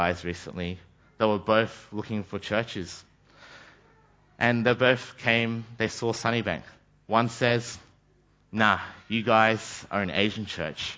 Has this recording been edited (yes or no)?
no